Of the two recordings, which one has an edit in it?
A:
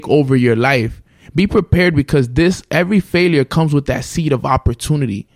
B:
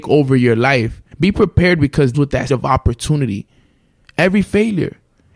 B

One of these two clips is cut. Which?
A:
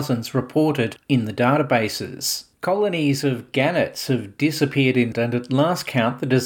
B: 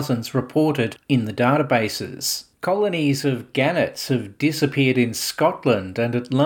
A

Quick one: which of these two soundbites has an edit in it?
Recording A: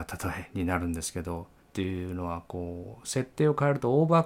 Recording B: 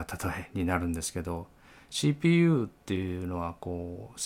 A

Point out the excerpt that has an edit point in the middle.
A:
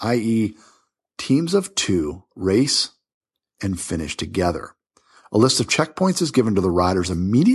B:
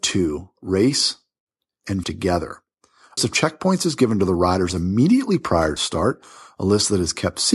B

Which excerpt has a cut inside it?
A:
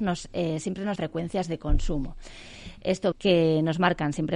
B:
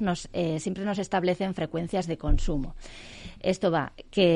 A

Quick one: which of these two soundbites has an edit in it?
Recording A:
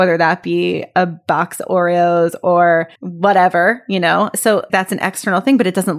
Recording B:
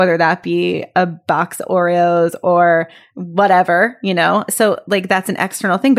A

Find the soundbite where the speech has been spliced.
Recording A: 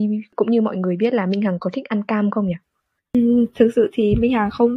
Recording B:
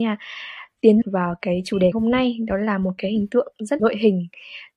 B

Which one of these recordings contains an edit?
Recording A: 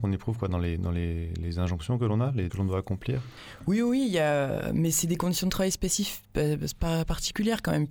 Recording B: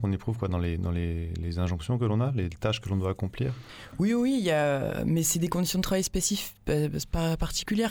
A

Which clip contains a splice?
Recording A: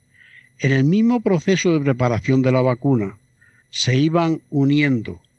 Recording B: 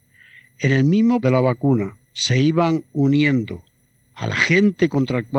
B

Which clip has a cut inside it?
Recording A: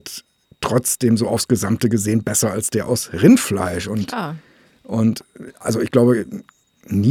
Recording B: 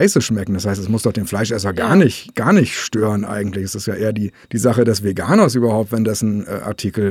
B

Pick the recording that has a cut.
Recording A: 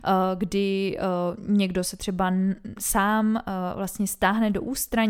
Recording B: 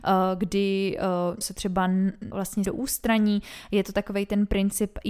B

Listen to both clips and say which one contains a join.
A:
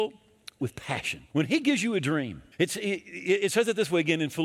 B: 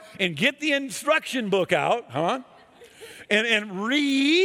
A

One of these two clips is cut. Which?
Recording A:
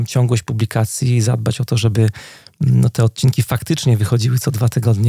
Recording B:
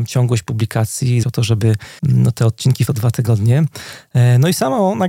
B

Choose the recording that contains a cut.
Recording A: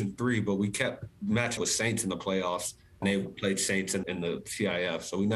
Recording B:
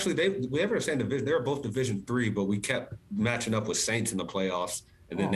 A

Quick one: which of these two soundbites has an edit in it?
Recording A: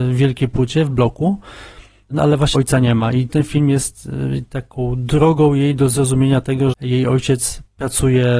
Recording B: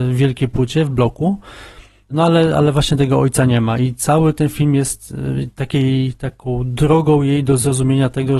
A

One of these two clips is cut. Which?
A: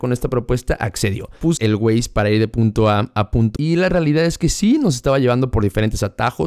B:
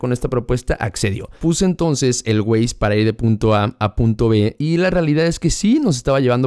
A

